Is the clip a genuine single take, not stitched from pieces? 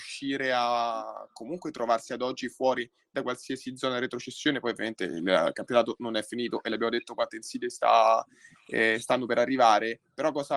yes; 0 cuts

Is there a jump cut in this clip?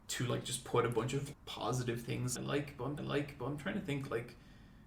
yes; 3 cuts; at 1.3 s, 2.4 s, 3.0 s

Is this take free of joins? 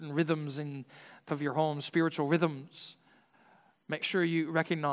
no; 2 cuts; at 1.3 s, 4.0 s

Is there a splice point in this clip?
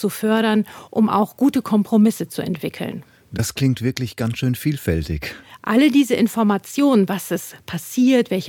no; 0 cuts

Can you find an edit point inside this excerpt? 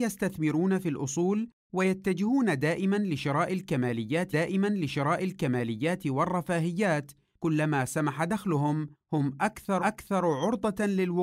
yes; 2 cuts; at 4.3 s, 9.8 s

